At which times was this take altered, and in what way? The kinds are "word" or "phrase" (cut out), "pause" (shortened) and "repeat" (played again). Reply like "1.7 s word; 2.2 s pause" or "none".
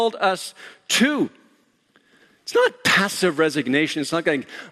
none